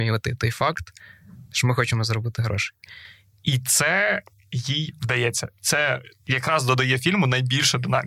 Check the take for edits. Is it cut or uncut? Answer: uncut